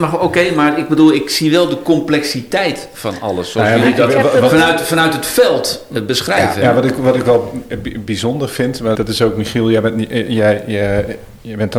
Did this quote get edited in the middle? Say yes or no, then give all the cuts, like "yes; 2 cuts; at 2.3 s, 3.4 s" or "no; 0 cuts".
yes; 1 cut; at 8.9 s